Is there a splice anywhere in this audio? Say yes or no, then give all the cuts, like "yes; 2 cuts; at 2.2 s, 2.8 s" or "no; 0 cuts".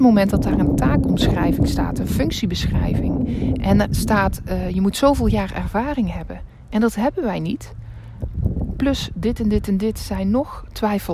yes; 1 cut; at 3.8 s